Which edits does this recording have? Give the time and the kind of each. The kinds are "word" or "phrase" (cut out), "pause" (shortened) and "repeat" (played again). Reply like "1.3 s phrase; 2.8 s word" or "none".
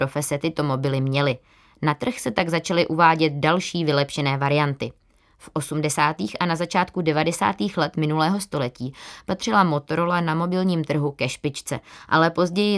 none